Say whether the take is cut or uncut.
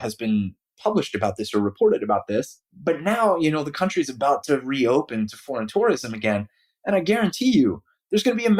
cut